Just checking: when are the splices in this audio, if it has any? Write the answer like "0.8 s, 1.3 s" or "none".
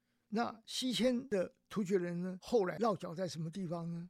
none